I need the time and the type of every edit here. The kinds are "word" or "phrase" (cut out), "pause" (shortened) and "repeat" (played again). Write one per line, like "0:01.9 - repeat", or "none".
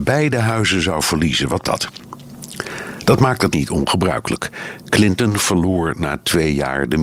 0:01.6 - word
0:03.5 - phrase